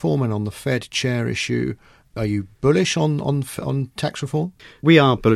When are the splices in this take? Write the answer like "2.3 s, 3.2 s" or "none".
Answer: none